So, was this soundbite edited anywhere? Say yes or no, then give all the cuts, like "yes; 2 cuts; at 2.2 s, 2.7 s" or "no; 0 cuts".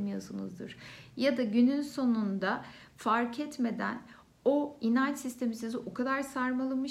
no; 0 cuts